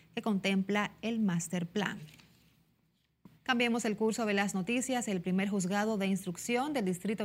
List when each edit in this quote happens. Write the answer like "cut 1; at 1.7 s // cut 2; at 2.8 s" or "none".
cut 1; at 3.3 s